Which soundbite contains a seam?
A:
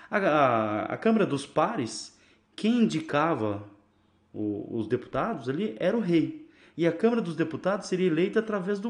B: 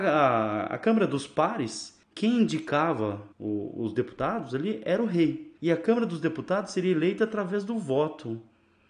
B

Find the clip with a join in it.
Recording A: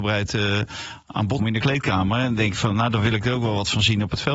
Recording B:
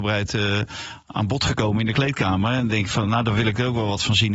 A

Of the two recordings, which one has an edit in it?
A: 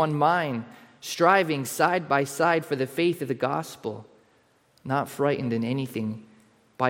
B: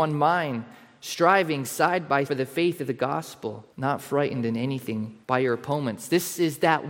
B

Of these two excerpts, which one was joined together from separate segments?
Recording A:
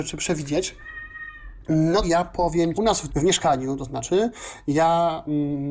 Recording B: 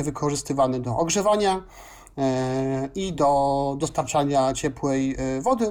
A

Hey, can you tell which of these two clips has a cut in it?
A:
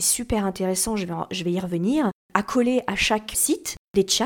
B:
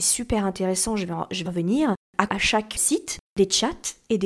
B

